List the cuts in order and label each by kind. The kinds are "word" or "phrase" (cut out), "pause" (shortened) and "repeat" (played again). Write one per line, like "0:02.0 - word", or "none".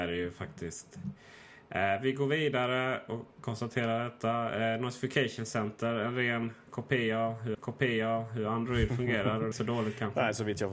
0:07.5 - repeat
0:09.5 - phrase